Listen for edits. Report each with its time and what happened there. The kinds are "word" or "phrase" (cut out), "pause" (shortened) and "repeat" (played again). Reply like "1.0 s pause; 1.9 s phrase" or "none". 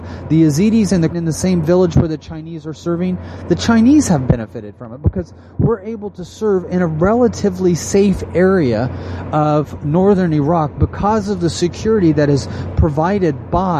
1.1 s phrase